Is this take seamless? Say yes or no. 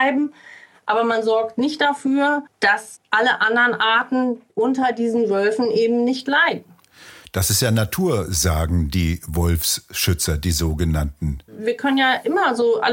no